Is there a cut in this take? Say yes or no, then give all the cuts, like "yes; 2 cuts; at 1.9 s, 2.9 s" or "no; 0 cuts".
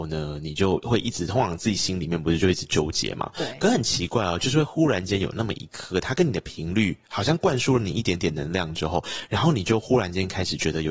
no; 0 cuts